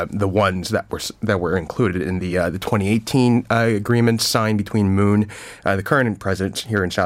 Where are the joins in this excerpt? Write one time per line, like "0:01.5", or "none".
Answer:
none